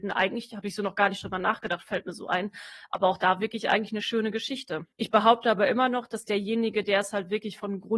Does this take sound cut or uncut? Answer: cut